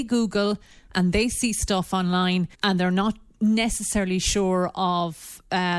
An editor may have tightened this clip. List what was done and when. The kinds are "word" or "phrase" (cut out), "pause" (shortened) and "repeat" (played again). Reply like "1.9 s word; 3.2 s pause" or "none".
2.5 s pause